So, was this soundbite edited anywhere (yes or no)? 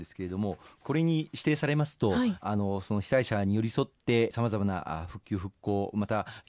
yes